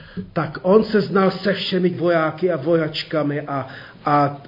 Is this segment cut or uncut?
cut